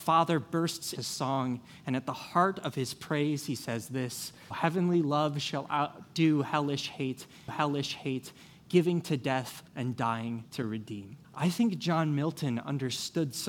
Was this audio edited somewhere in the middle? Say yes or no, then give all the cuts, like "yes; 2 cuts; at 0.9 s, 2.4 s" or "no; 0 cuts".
yes; 6 cuts; at 1.0 s, 4.5 s, 7.5 s, 9.7 s, 10.5 s, 11.2 s